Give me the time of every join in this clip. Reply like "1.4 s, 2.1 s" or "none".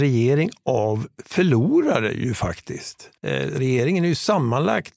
3.2 s